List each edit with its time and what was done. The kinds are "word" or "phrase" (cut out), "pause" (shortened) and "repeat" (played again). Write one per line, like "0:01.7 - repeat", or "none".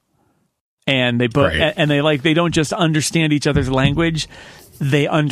none

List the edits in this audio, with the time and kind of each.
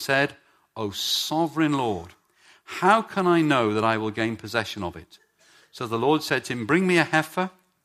none

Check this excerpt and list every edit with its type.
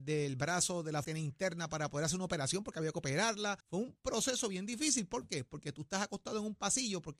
0:01.0 - phrase
0:03.6 - pause

